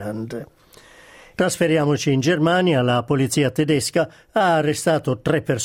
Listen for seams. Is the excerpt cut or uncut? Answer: uncut